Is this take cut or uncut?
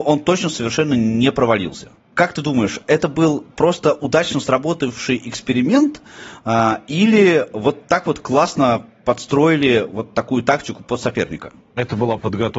uncut